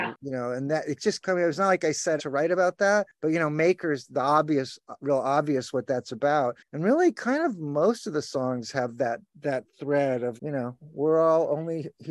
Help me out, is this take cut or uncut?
cut